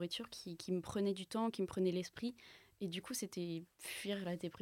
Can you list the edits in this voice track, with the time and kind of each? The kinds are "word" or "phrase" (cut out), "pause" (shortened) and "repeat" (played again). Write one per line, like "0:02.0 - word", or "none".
none